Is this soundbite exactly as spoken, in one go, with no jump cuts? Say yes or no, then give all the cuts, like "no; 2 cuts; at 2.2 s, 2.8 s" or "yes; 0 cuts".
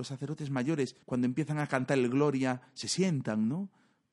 no; 1 cut; at 1.0 s